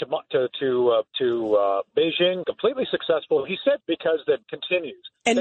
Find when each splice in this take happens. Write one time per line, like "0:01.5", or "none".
0:01.1
0:02.4
0:03.8
0:04.4